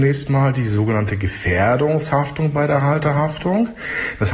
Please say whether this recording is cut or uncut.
uncut